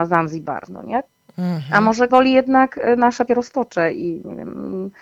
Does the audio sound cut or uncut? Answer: cut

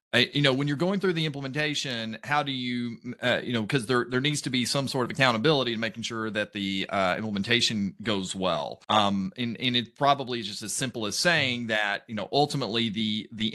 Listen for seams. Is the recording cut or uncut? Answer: cut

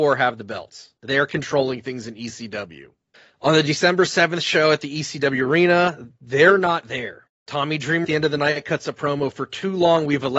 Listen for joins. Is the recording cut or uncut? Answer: cut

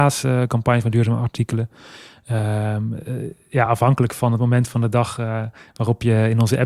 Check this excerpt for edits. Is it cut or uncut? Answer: uncut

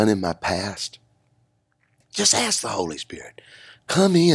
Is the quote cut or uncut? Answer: uncut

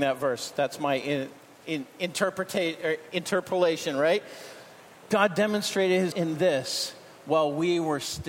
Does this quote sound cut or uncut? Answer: cut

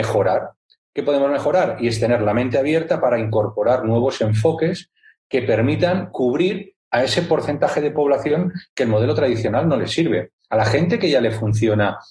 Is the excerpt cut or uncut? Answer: uncut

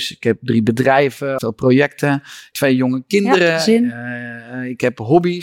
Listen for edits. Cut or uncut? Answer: cut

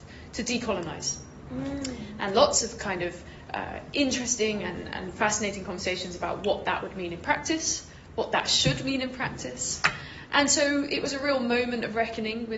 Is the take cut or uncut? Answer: uncut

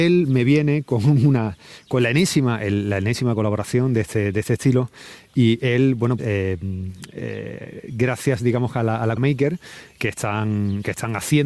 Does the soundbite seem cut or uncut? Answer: cut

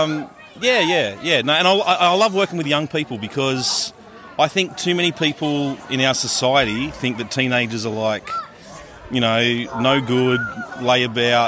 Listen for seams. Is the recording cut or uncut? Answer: uncut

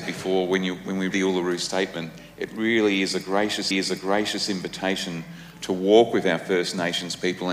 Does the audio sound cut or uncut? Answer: cut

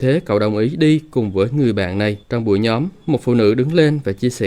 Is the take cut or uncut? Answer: cut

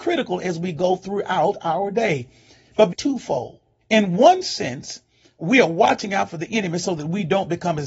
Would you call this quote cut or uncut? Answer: cut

